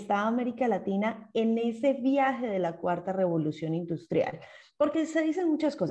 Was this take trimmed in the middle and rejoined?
no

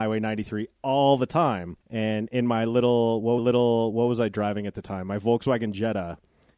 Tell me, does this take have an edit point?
yes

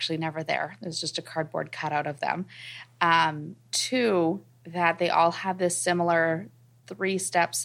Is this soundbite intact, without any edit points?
yes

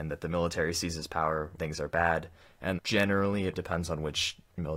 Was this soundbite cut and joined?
yes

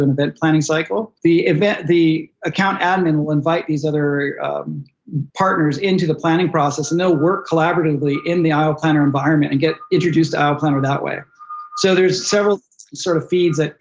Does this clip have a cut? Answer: yes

